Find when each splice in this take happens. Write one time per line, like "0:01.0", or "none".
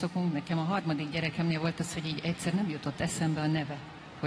none